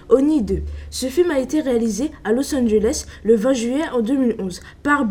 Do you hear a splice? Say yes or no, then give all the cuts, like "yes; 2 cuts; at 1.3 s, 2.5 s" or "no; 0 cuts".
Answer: no; 0 cuts